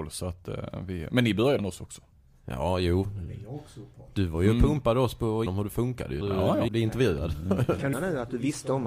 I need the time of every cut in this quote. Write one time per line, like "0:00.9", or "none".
0:01.6
0:05.5
0:06.2
0:06.7
0:07.9